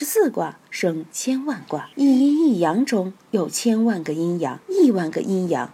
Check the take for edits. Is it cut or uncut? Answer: cut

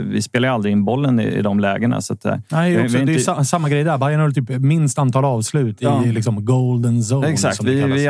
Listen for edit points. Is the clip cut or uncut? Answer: uncut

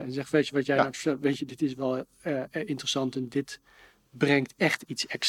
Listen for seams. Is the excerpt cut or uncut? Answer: uncut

